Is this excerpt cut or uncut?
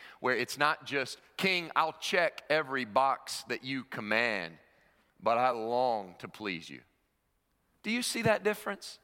uncut